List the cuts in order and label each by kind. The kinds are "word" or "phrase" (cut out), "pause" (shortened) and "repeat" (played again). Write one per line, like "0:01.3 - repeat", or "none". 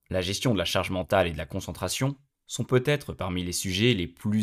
none